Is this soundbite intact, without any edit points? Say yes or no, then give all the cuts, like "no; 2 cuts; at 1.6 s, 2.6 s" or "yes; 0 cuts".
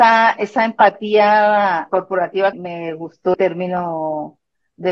no; 3 cuts; at 1.9 s, 2.5 s, 3.3 s